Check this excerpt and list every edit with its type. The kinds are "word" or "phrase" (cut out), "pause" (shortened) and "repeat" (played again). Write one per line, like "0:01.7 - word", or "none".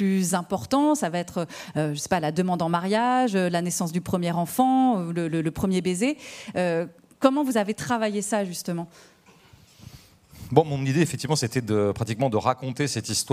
none